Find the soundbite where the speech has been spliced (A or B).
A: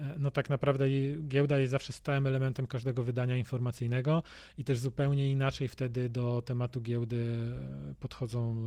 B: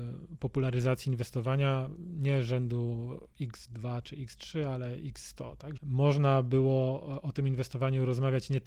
B